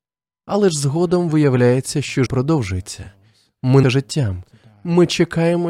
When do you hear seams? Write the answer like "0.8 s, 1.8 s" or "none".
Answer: 2.3 s, 3.8 s